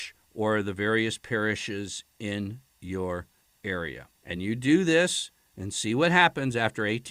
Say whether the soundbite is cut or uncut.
uncut